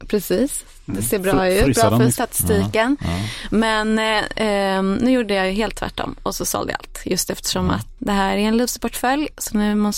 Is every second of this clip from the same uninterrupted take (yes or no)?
no